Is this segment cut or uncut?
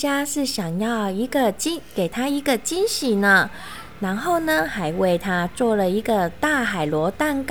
uncut